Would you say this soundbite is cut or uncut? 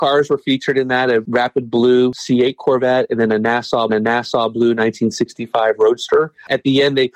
cut